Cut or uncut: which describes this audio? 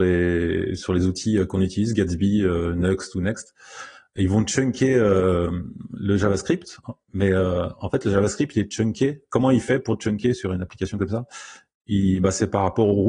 uncut